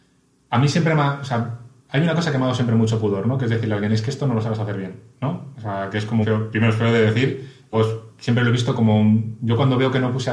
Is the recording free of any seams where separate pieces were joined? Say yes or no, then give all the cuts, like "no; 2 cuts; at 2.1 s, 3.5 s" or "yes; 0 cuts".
no; 2 cuts; at 6.2 s, 7.7 s